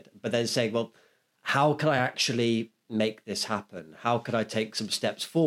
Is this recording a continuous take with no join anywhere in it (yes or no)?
yes